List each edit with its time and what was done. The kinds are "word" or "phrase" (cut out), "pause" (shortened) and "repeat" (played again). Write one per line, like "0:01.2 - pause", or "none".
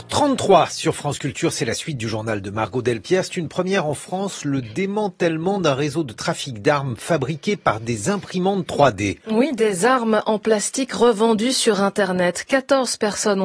none